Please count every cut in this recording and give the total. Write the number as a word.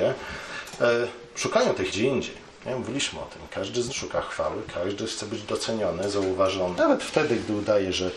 three